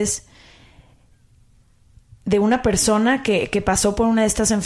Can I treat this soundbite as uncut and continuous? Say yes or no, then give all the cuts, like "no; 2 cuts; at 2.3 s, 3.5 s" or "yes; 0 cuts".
yes; 0 cuts